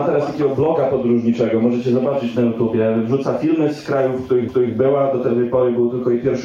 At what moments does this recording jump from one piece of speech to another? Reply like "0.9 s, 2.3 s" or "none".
4.5 s